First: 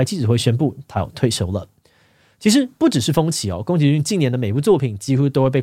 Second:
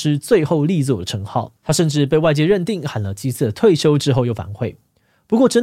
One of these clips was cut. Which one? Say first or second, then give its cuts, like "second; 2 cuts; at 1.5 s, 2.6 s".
second; 1 cut; at 1.6 s